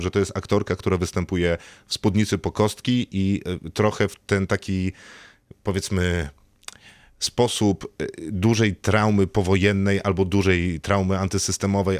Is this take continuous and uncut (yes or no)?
yes